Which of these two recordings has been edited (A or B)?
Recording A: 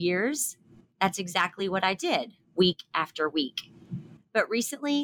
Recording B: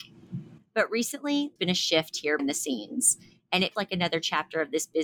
B